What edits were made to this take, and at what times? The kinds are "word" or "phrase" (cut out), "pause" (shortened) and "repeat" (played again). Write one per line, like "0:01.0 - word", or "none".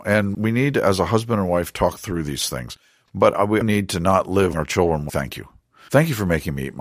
0:03.6 - word
0:04.5 - word
0:05.1 - word